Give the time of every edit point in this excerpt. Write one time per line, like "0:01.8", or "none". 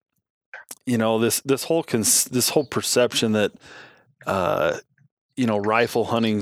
none